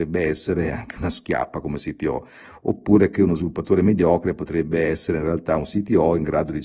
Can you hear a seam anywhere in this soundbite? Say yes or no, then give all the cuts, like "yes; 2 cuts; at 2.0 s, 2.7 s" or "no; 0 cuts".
no; 0 cuts